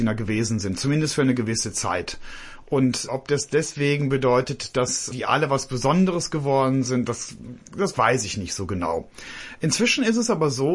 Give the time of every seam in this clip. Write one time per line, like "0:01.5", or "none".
none